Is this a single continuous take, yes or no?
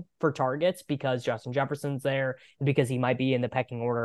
yes